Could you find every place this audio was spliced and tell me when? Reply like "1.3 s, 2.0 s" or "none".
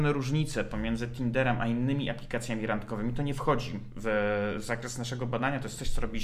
none

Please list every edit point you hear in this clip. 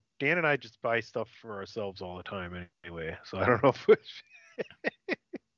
2.7 s

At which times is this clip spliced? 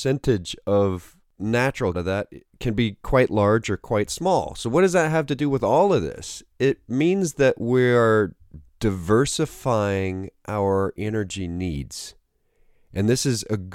1.9 s

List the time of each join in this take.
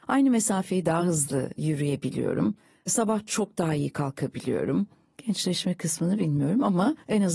none

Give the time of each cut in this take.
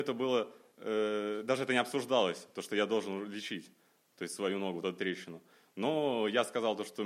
none

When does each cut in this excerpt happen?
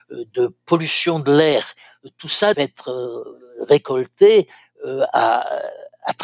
2.5 s

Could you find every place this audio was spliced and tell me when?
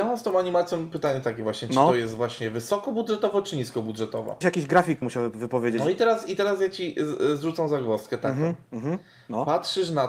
4.4 s, 5.0 s

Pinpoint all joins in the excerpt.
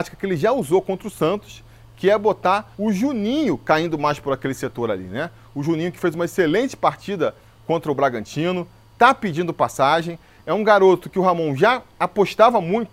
2.7 s

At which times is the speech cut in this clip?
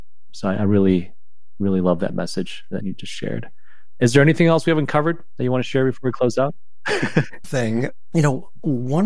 2.8 s, 7.4 s

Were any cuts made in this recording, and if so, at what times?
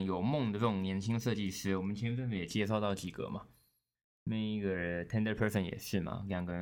none

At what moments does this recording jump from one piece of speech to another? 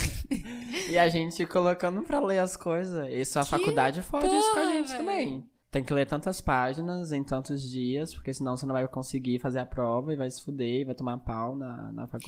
2.0 s

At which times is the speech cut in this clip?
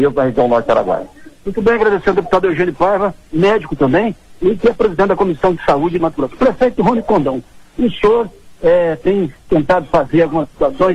1.4 s, 6.0 s

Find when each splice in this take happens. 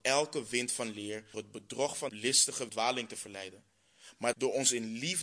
1.3 s, 2.1 s, 2.7 s, 4.3 s

